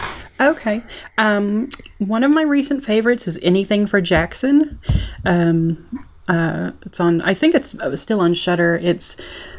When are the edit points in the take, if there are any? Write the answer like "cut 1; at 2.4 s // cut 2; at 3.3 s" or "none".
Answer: none